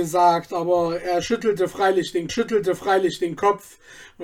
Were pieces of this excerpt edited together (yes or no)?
yes